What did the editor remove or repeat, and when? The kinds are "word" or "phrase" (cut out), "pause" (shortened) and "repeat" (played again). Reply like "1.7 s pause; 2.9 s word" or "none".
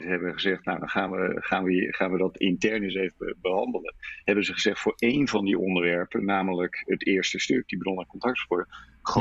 none